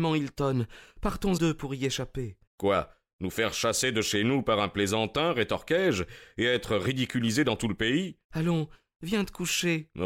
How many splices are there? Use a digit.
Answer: 3